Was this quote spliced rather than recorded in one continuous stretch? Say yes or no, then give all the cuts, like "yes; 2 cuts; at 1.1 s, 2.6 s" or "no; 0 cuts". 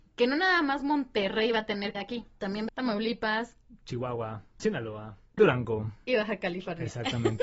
yes; 5 cuts; at 1.9 s, 2.3 s, 2.7 s, 4.6 s, 5.4 s